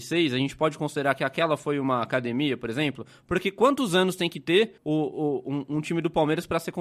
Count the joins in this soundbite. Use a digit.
1